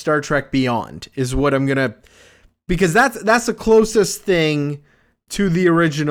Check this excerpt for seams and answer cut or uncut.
uncut